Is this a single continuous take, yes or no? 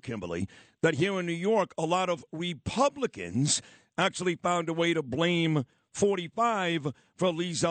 yes